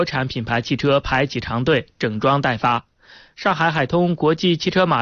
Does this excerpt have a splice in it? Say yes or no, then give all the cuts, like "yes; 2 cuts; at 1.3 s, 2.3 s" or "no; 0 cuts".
no; 0 cuts